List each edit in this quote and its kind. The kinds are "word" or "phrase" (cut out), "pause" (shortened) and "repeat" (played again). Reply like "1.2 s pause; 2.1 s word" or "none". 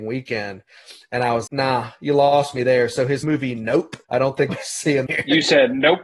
1.5 s word; 3.2 s word; 4.0 s pause; 4.5 s word; 5.1 s phrase